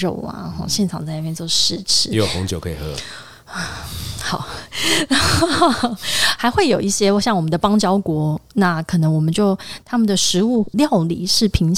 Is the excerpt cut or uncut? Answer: uncut